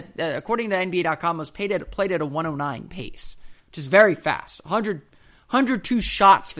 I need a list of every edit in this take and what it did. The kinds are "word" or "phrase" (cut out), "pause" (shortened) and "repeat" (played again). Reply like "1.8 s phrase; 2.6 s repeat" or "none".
3.6 s pause

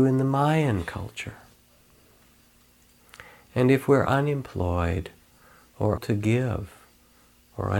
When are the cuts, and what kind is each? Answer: 6.0 s word

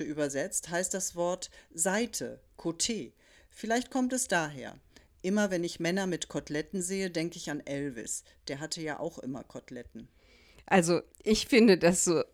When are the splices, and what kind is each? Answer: none

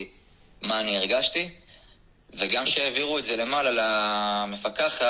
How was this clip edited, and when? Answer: none

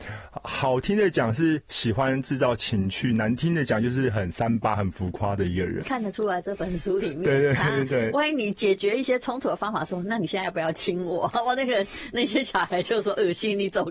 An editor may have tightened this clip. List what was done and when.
5.8 s word

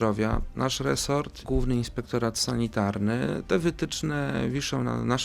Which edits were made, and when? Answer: 1.4 s word

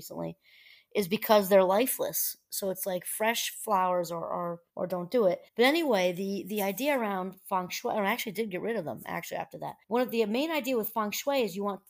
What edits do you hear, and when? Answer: 4.7 s pause; 5.5 s pause; 9.8 s pause

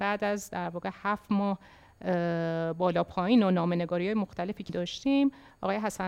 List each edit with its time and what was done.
4.7 s word

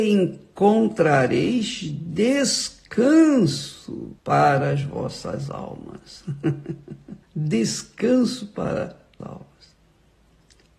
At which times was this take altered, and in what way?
4.2 s pause; 7.2 s pause; 9.2 s word

